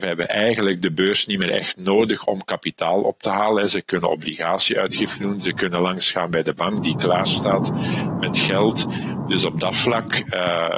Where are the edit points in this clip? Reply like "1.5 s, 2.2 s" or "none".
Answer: none